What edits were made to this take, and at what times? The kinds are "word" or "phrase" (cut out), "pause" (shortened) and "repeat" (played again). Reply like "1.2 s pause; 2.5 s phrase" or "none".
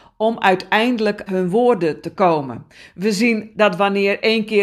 1.3 s word; 2.1 s word; 3.5 s word